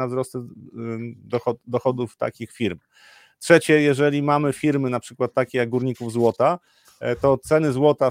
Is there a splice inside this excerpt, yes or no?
no